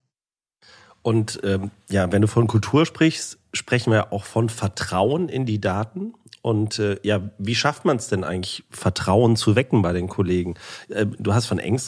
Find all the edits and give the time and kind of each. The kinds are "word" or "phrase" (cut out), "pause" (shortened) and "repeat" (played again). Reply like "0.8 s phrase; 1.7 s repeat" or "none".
none